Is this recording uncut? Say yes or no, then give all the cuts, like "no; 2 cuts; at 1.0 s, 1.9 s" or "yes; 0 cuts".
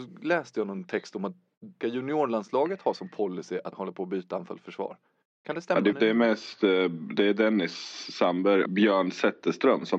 no; 4 cuts; at 1.8 s, 3.7 s, 5.9 s, 8.7 s